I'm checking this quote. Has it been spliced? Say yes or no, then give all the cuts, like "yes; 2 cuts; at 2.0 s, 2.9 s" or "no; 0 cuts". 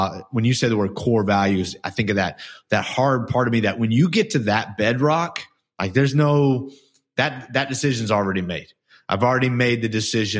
no; 0 cuts